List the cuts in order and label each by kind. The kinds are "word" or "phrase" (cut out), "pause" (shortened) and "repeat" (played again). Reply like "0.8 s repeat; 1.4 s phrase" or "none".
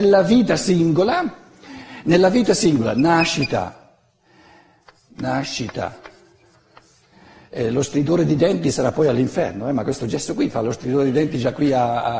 none